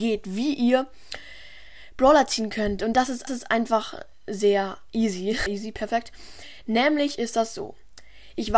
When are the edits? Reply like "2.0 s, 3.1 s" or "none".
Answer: 3.3 s, 5.5 s

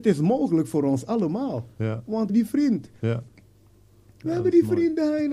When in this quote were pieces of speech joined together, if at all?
2.3 s

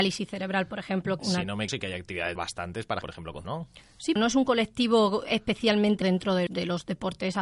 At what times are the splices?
1.2 s, 1.7 s, 2.4 s, 3.0 s, 3.4 s, 4.2 s, 6.0 s, 6.5 s

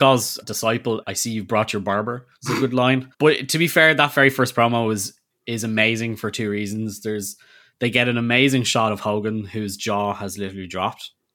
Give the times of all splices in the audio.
none

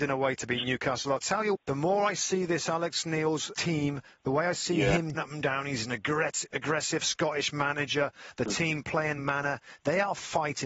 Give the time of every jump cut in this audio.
1.5 s, 3.5 s, 5.1 s, 9.2 s

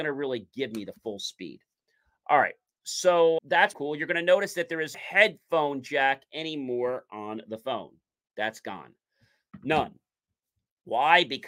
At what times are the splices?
3.4 s, 3.7 s, 4.9 s

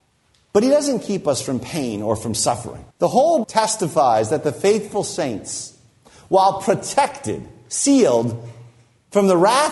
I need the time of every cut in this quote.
2.9 s, 3.4 s

